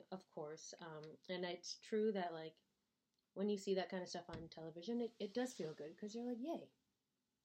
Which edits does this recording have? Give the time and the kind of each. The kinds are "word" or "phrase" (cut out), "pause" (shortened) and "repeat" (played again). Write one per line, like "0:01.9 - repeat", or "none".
none